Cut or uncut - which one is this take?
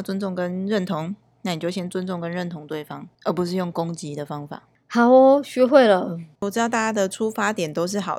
uncut